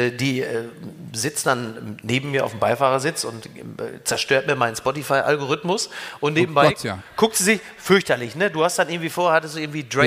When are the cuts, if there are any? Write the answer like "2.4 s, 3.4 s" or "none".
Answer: none